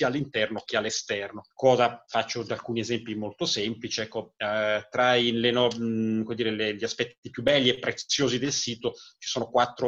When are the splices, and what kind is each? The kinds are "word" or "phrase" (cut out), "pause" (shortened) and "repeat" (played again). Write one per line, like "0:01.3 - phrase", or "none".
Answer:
0:01.5 - pause